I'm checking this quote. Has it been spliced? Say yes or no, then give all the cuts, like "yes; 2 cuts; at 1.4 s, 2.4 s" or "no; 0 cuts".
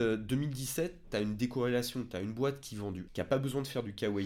yes; 1 cut; at 3.1 s